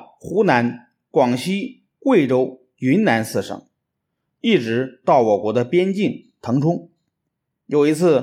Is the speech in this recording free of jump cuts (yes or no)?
yes